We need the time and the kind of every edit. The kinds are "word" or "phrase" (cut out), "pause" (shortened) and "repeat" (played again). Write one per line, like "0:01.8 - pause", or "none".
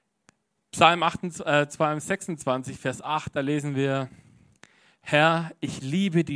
none

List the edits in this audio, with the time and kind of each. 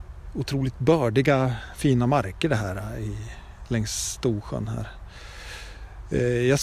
none

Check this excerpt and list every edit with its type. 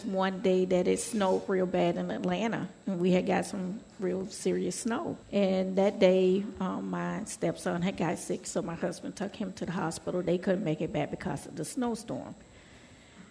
0:05.2 - pause

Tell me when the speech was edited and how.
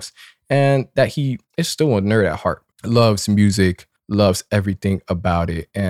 0:01.5 - pause
0:02.7 - pause
0:04.0 - pause

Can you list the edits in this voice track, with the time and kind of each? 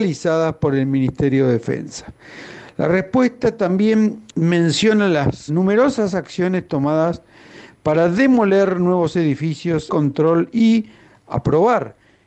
0:04.3 - pause
0:05.5 - word
0:09.9 - phrase

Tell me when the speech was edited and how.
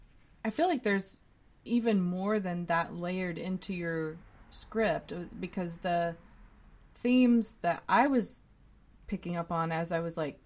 none

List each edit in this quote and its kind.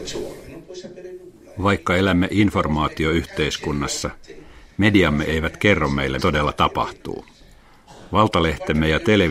0:06.2 - word

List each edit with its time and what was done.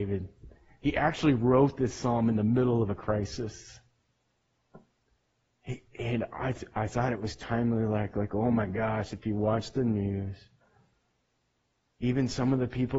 none

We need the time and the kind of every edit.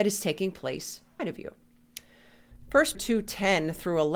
0:01.2 - word
0:02.9 - word

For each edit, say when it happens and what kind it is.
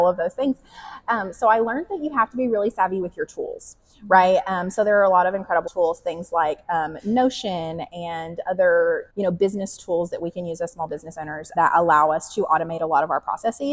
0:05.7 - word
0:09.1 - pause
0:11.6 - word

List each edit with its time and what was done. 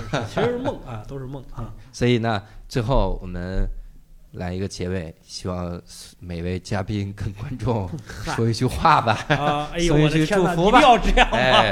0:04.3 - pause

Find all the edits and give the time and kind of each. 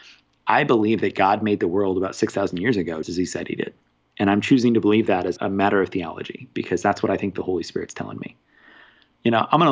0:03.0 - word
0:05.4 - word

